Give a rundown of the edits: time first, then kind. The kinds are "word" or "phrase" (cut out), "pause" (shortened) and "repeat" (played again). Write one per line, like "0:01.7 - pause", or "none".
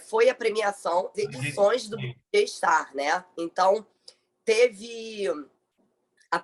0:01.1 - phrase